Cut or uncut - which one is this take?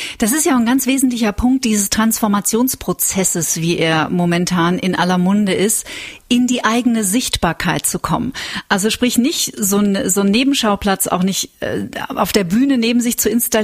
uncut